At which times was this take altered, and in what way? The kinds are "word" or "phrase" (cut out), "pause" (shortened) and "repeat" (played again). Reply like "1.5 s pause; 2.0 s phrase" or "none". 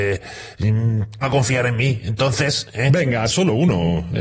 1.2 s word; 3.3 s word